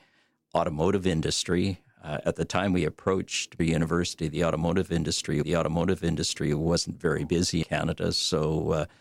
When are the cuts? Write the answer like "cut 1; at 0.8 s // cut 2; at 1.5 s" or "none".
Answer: cut 1; at 3.6 s // cut 2; at 5.4 s // cut 3; at 7.6 s

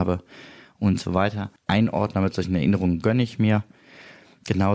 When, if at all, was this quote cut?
cut 1; at 1.6 s

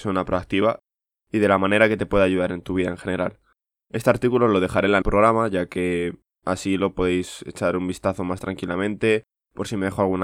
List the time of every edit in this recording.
cut 1; at 5.0 s // cut 2; at 6.3 s

